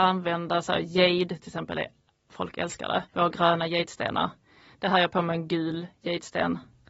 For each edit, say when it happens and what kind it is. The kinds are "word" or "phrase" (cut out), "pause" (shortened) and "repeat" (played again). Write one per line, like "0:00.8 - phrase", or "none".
0:03.1 - pause